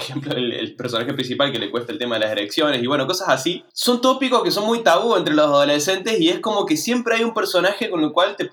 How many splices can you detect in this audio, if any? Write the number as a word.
one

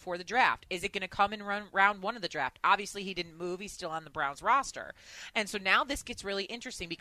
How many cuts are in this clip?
zero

